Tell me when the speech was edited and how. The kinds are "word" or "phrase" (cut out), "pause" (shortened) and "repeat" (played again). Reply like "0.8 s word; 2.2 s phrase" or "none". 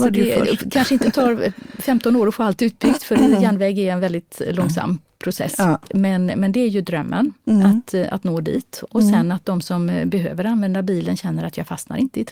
none